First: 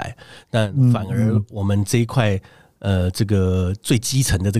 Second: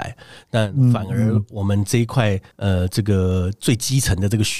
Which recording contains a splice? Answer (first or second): second